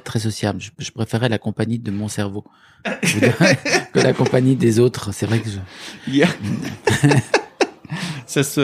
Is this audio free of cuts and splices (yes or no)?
yes